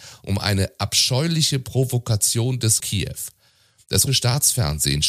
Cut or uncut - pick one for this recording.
cut